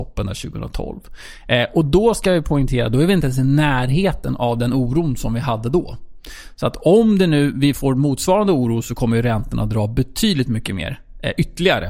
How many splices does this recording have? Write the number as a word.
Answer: zero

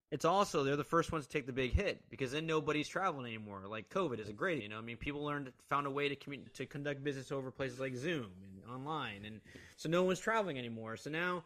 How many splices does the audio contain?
three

